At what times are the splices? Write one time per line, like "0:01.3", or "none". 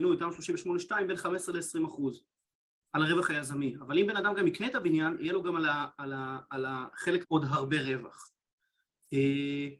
0:07.2